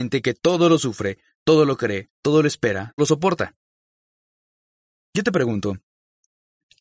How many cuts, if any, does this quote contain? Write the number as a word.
one